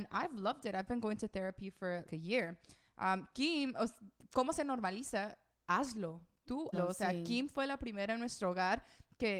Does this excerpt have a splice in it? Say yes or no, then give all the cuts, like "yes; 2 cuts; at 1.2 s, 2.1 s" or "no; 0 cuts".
yes; 2 cuts; at 2.1 s, 6.7 s